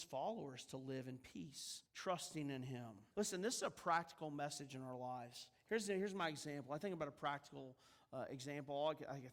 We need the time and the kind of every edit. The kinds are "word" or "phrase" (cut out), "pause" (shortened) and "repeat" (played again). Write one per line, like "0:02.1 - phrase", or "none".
0:01.9 - pause
0:03.1 - pause